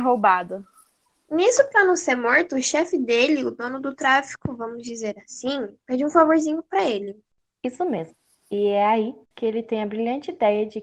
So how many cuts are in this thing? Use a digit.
0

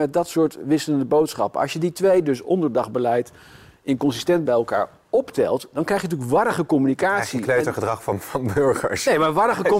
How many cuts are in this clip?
1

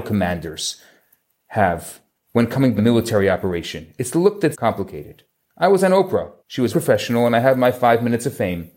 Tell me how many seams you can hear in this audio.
4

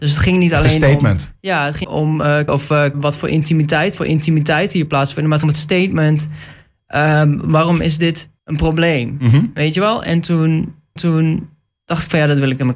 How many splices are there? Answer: 7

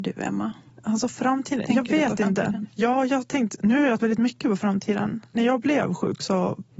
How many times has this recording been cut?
1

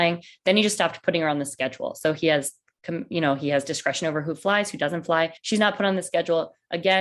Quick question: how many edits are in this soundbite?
1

